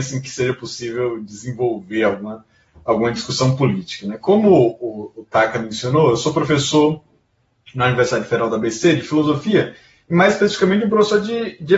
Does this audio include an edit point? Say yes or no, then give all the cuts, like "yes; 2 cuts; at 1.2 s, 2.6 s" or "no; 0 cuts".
no; 0 cuts